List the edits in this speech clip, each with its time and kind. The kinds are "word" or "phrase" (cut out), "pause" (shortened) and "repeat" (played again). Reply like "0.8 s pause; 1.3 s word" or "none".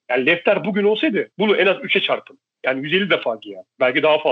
1.3 s pause